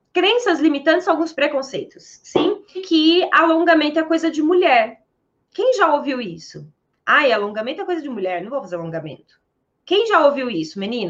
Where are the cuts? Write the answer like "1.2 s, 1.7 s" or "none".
1.3 s, 2.7 s